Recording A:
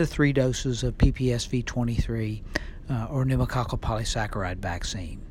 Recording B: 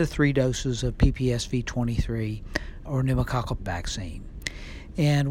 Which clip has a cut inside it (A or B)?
B